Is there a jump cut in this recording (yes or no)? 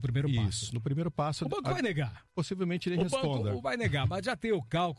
yes